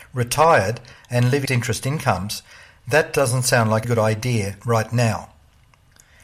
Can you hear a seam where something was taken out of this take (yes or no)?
yes